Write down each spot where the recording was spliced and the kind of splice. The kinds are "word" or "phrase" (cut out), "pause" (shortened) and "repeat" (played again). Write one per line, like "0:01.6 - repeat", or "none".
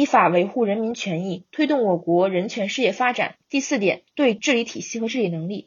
0:03.4 - pause
0:04.1 - pause